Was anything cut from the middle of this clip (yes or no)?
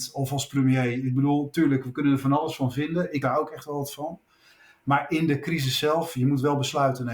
yes